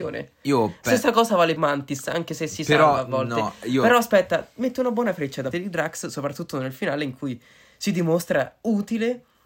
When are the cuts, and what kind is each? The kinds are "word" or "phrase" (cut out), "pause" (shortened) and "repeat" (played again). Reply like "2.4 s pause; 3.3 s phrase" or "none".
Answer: 1.6 s word; 5.5 s word

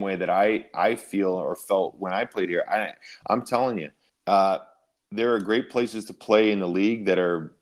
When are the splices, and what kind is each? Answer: 4.1 s pause

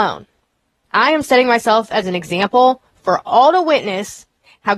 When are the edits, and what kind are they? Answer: none

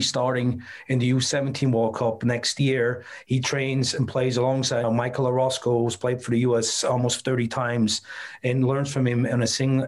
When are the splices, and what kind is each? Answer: 4.8 s word

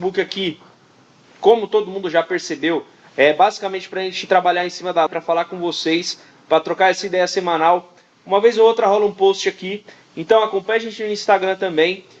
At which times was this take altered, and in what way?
5.1 s word

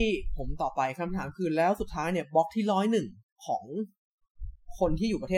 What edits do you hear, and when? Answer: 3.2 s pause

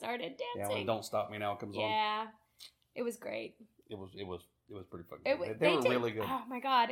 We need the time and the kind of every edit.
none

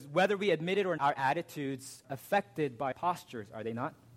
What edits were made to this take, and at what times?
1.0 s word; 2.0 s word; 2.9 s word

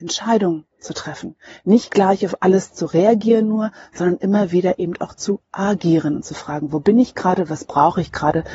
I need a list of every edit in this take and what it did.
none

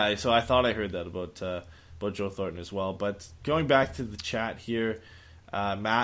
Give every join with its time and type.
none

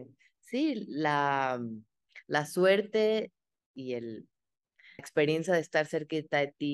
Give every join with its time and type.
5.0 s word

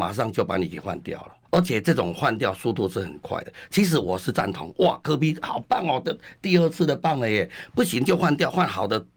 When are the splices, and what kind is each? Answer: 1.4 s pause

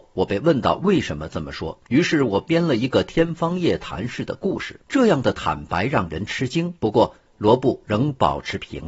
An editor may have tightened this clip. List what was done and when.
1.9 s pause; 4.8 s pause; 6.8 s pause

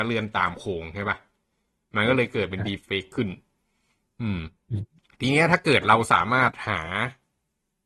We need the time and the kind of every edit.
5.0 s pause

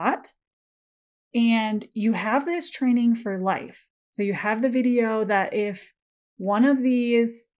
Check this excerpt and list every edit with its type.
none

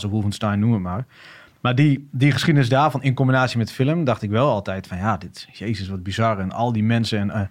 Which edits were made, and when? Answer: none

